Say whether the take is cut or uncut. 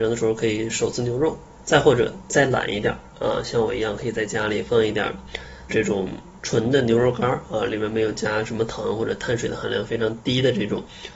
cut